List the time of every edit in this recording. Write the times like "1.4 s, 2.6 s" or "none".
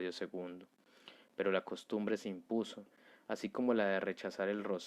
none